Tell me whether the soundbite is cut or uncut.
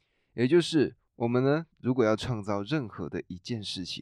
cut